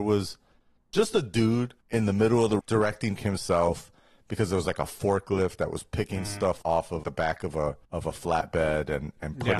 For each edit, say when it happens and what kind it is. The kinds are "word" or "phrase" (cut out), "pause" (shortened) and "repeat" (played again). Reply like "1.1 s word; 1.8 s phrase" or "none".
1.8 s pause; 2.6 s word; 3.2 s word; 6.6 s word; 7.0 s word; 7.8 s pause